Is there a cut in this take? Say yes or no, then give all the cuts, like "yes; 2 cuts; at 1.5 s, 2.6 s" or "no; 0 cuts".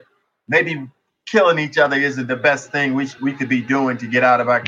no; 0 cuts